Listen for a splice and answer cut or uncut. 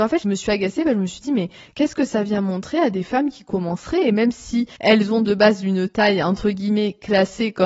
uncut